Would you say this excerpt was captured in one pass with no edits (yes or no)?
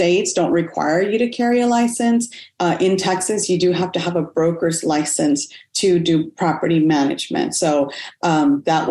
yes